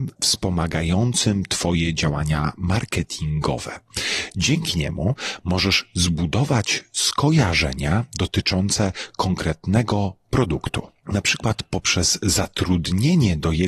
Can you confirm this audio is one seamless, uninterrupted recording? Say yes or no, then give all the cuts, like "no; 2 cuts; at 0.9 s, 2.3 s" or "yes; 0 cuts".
yes; 0 cuts